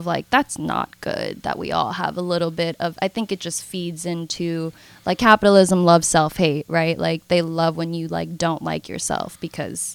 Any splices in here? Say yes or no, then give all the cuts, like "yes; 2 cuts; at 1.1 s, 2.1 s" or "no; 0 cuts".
no; 0 cuts